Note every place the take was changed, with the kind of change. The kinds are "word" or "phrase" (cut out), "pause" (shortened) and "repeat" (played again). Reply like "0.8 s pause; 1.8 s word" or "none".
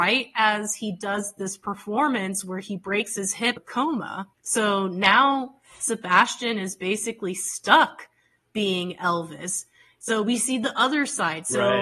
3.6 s phrase; 4.3 s pause

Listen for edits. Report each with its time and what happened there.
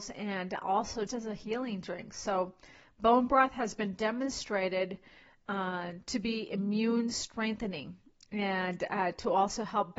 1.1 s word

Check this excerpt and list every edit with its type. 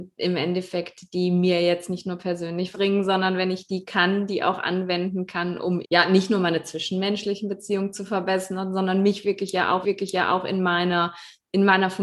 2.7 s word; 5.8 s word; 9.8 s repeat

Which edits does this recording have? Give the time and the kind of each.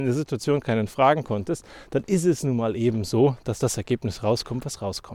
none

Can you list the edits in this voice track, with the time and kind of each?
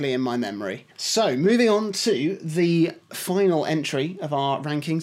0.9 s pause

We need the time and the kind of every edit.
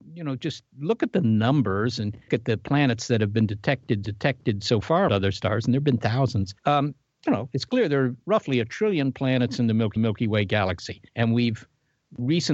2.3 s word; 4.0 s repeat; 5.1 s word; 6.6 s pause; 10.0 s repeat; 11.1 s pause

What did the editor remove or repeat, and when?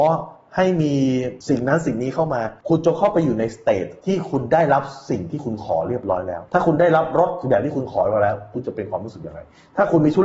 none

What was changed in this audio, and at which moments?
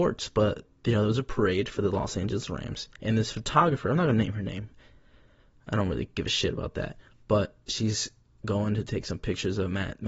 2.9 s pause

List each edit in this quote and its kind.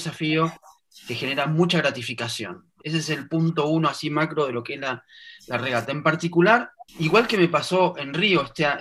6.9 s pause

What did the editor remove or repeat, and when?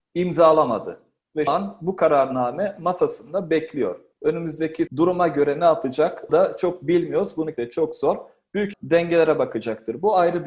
1.5 s word; 4.9 s word; 6.3 s word; 7.5 s word; 8.7 s word

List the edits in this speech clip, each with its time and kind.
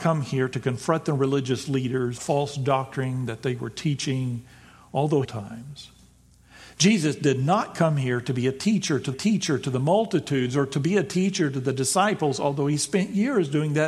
2.2 s word; 5.2 s phrase; 9.1 s repeat

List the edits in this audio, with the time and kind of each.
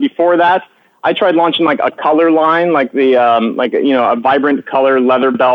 none

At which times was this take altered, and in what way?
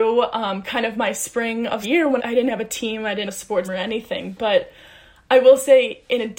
1.8 s word; 2.2 s word; 3.3 s word; 3.6 s word

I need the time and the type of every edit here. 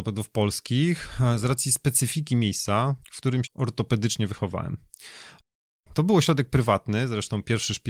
3.0 s pause; 3.4 s word

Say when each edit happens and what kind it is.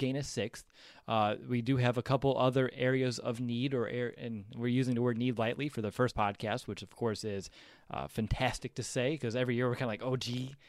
6.1 s phrase

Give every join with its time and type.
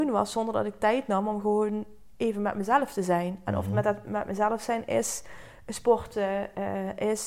none

